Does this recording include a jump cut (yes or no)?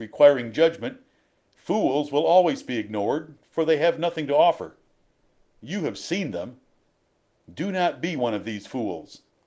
no